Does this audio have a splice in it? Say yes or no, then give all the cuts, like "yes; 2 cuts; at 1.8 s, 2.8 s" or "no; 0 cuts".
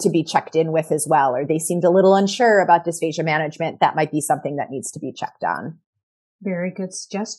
no; 0 cuts